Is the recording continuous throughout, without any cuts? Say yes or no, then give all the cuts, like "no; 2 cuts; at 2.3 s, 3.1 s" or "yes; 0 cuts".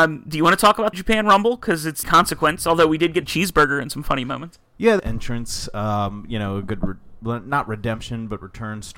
no; 5 cuts; at 0.9 s, 2.0 s, 3.2 s, 4.7 s, 5.0 s